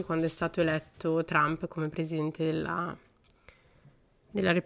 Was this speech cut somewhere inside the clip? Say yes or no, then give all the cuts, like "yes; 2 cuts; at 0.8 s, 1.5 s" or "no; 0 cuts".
no; 0 cuts